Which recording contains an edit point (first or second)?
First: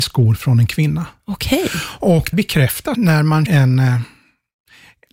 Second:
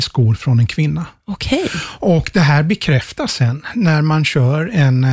first